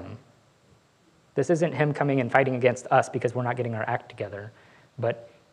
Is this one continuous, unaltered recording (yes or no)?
yes